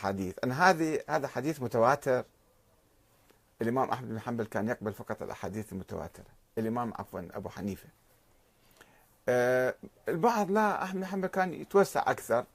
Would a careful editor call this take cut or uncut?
uncut